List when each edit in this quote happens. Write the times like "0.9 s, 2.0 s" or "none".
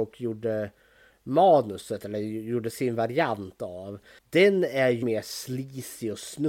4.2 s, 5.0 s